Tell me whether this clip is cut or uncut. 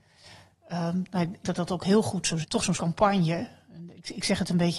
cut